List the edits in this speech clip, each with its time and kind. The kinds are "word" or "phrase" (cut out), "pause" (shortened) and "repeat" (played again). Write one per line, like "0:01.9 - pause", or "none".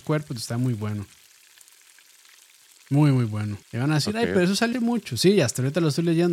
0:03.6 - pause
0:04.7 - word